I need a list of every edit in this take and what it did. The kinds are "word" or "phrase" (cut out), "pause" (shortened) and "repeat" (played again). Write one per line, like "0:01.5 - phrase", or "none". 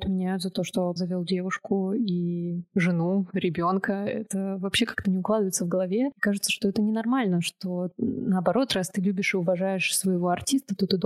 0:01.0 - word